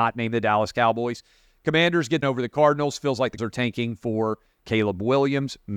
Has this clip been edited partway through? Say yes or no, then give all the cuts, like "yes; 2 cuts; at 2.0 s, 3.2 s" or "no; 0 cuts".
yes; 2 cuts; at 2.2 s, 3.4 s